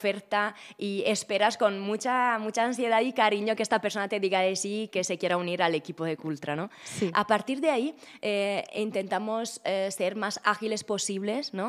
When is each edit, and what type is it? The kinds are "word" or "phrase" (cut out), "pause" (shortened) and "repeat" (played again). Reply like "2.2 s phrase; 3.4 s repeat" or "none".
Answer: none